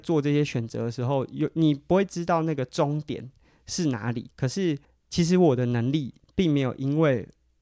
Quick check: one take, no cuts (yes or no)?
no